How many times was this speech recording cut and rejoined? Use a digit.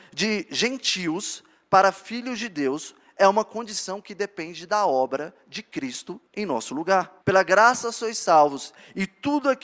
2